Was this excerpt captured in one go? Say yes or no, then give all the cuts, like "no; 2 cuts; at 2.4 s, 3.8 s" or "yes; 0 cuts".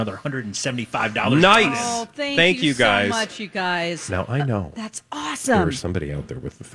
yes; 0 cuts